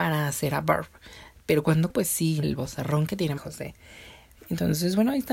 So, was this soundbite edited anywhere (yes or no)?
yes